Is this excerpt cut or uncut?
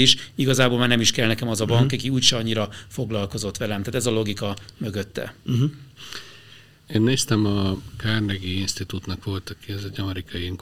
uncut